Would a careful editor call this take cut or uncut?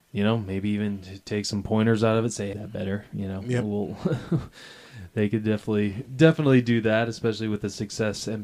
cut